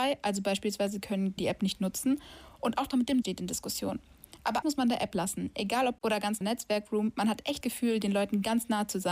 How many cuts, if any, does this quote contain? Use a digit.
7